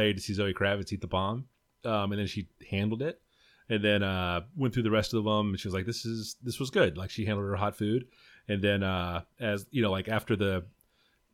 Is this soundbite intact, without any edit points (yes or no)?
yes